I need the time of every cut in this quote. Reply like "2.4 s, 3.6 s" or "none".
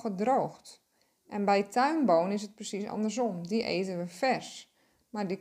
none